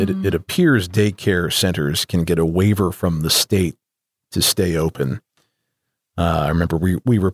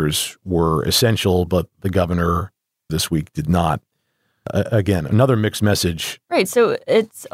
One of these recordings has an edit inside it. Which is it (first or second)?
second